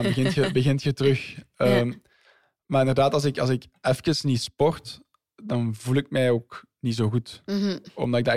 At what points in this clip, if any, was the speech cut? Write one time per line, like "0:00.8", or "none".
none

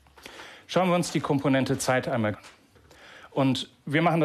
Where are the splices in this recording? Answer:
0:02.3

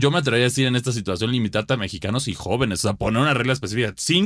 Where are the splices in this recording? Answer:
none

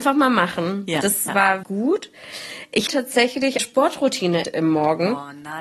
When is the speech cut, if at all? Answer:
0:01.3
0:01.6
0:02.9
0:03.6
0:04.4

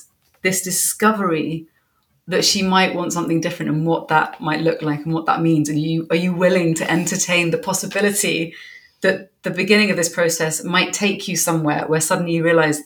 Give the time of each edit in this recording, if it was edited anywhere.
none

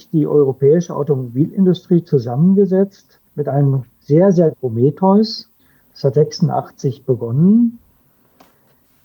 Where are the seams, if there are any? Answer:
0:03.3
0:04.5
0:05.6
0:06.1

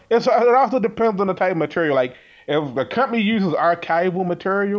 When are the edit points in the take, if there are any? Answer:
none

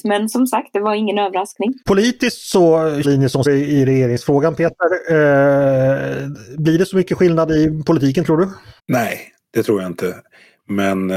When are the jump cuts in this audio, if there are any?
0:01.8
0:03.0
0:03.5
0:08.8

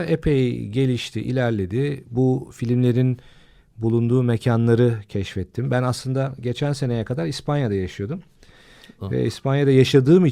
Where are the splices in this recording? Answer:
none

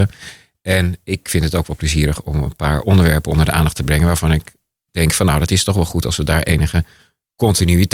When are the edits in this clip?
none

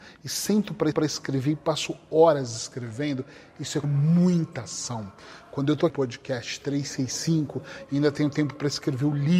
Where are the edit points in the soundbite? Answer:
0:00.9
0:03.8
0:05.9

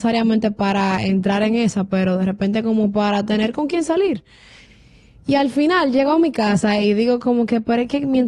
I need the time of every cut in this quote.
none

